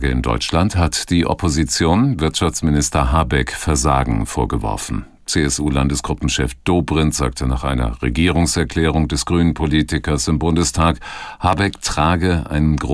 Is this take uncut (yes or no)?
yes